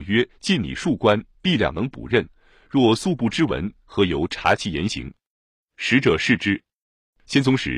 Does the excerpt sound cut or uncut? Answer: uncut